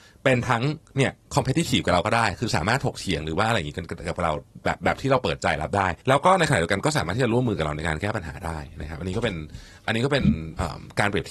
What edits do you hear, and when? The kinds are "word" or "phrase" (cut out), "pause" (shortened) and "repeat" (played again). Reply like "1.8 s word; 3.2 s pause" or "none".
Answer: 6.0 s pause

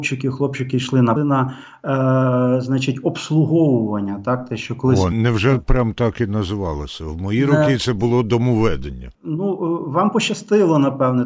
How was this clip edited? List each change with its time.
1.2 s phrase; 5.1 s word; 9.1 s pause

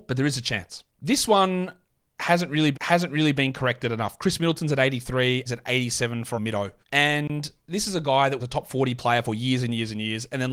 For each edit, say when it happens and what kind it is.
0.9 s pause; 2.7 s repeat; 5.5 s word; 6.3 s word; 6.8 s pause; 8.4 s phrase

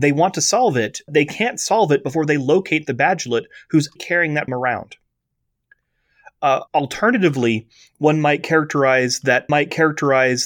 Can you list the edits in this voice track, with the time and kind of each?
1.1 s word; 4.0 s word; 4.5 s word; 6.7 s pause; 9.5 s repeat

